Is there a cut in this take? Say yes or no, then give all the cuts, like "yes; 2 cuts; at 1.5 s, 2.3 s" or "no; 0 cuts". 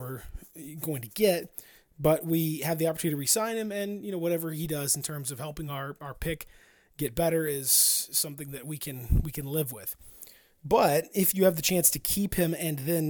no; 0 cuts